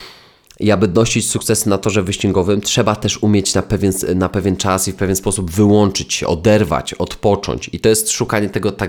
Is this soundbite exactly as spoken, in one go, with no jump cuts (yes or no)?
yes